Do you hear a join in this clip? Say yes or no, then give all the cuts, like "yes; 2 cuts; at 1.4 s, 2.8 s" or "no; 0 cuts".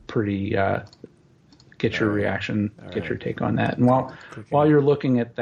no; 0 cuts